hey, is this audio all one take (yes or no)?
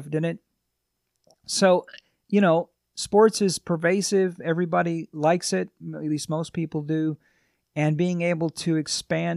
yes